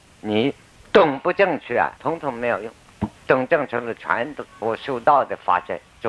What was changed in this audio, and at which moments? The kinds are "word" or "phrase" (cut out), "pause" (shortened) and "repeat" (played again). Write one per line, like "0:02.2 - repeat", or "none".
0:02.0 - pause
0:03.2 - pause